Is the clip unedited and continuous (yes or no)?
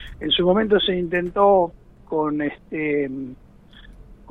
no